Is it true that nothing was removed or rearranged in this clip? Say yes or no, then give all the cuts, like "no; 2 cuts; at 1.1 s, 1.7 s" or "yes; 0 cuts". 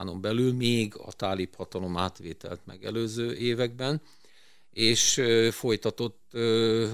yes; 0 cuts